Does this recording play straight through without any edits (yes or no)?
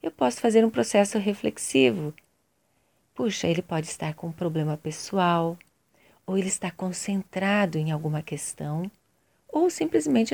yes